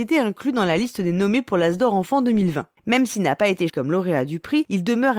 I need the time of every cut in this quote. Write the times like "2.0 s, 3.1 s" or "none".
3.7 s